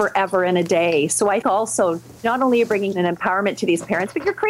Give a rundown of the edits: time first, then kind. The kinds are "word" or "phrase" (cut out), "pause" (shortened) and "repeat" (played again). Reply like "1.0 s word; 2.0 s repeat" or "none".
1.4 s word; 2.2 s pause; 2.9 s word

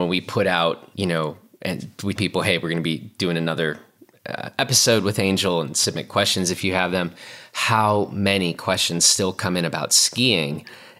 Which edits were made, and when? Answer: 2.2 s word

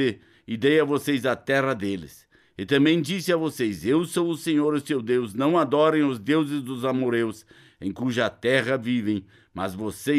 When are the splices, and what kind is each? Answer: none

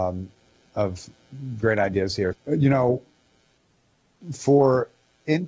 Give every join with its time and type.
2.3 s word

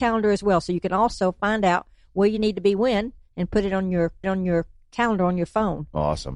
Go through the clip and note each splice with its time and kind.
4.2 s repeat

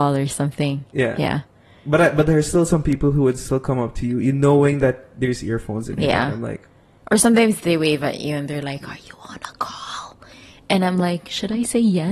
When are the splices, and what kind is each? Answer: none

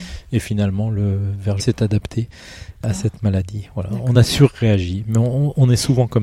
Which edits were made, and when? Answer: 1.6 s phrase; 4.1 s phrase

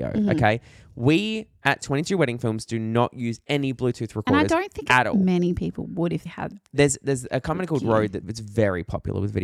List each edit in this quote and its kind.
6.3 s word; 8.2 s word

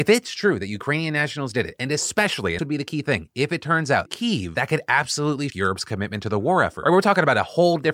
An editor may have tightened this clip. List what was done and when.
2.6 s word; 4.1 s phrase; 5.5 s word

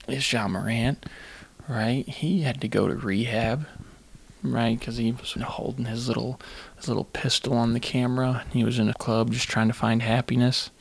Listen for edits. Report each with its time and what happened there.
4.4 s pause; 5.4 s word; 8.9 s word

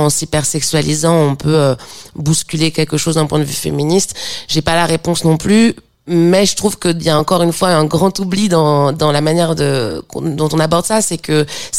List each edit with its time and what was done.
none

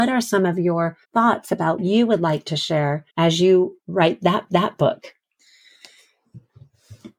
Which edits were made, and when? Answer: 1.0 s pause; 1.8 s phrase; 3.1 s pause; 4.5 s repeat

